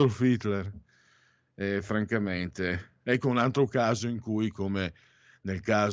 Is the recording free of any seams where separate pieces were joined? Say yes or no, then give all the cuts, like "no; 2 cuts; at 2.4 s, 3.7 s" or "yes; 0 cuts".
yes; 0 cuts